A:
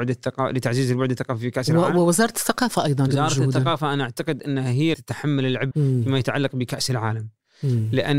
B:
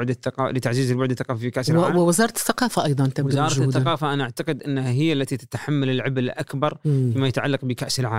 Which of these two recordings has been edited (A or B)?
A